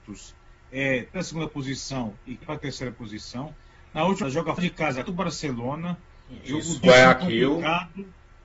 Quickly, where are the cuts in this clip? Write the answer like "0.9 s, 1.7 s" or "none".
1.2 s, 2.4 s, 4.2 s, 4.6 s, 5.1 s, 6.8 s